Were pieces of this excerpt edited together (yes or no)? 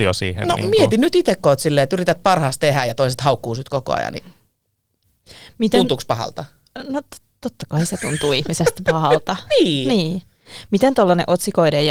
no